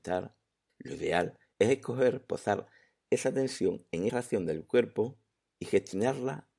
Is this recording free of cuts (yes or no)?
no